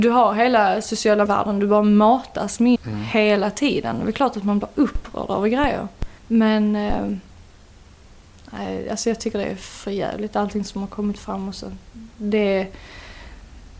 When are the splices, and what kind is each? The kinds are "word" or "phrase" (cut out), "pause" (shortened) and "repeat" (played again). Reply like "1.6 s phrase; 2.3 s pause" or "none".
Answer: 1.3 s word; 2.8 s word; 6.2 s pause